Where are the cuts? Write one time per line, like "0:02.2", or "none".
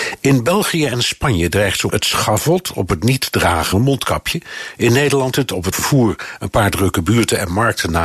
0:01.9
0:03.7
0:05.3
0:05.7